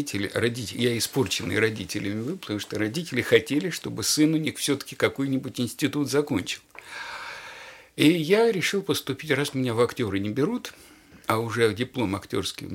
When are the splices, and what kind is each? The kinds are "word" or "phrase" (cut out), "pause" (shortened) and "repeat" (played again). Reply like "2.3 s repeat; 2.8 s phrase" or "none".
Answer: none